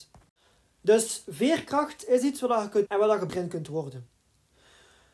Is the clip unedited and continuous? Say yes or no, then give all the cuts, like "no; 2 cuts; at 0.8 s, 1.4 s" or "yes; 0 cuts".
no; 2 cuts; at 2.9 s, 3.3 s